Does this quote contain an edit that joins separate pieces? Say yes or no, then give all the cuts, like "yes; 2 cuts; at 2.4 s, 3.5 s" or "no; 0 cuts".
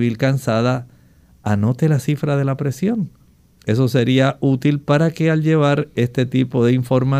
no; 0 cuts